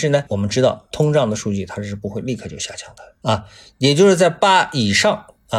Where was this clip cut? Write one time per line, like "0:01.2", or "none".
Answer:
none